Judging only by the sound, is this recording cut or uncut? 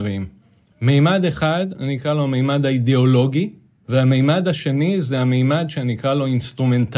uncut